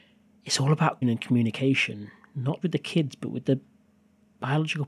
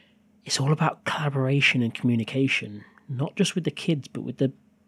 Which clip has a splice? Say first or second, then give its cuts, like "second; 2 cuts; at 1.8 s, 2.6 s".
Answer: first; 2 cuts; at 1.0 s, 2.6 s